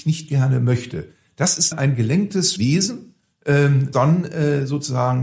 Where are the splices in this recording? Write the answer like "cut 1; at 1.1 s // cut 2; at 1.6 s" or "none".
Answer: cut 1; at 1.7 s // cut 2; at 2.6 s // cut 3; at 3.9 s